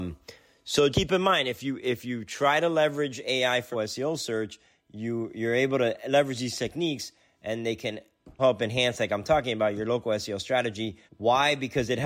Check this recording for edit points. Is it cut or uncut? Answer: cut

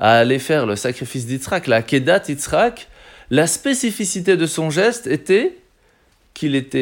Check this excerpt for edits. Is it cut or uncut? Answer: uncut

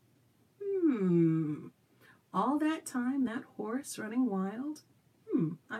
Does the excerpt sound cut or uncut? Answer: uncut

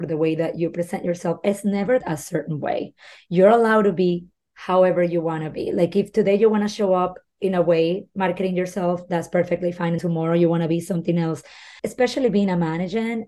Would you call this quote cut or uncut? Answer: cut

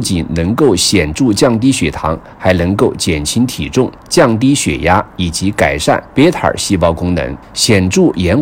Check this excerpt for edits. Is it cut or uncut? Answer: cut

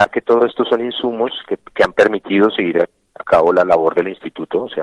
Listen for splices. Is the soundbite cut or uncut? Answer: uncut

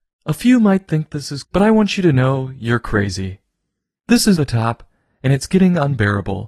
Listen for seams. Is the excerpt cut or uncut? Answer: cut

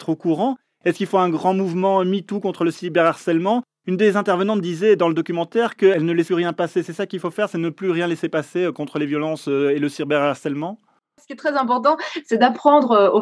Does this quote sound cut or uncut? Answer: cut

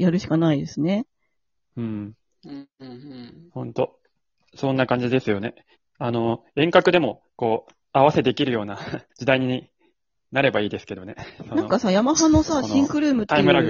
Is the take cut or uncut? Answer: cut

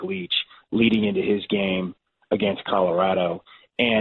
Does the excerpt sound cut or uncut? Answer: uncut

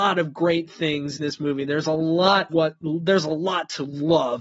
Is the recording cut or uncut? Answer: cut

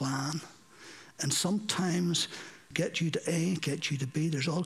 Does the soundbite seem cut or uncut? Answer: cut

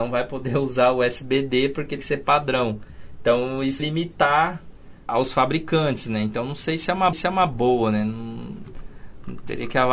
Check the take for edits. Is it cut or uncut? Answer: cut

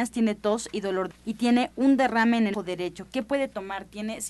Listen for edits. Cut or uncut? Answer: cut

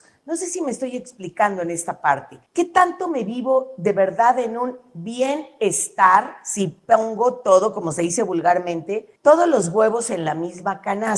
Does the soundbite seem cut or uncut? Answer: cut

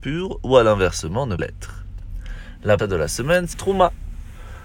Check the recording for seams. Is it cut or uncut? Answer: cut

